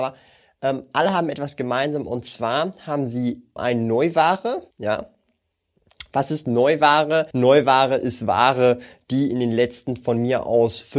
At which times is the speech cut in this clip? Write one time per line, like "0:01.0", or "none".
0:03.6
0:04.7
0:07.3